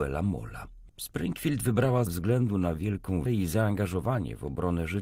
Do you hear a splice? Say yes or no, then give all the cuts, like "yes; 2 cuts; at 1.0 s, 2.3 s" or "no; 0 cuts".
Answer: yes; 2 cuts; at 2.1 s, 3.3 s